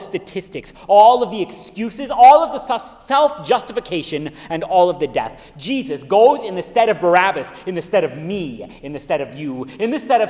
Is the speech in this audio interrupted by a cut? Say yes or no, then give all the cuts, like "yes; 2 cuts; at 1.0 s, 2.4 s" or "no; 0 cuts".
no; 0 cuts